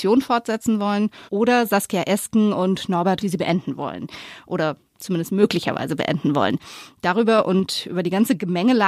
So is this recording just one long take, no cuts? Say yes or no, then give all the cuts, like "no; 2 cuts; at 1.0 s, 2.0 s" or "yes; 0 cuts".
no; 2 cuts; at 1.3 s, 3.2 s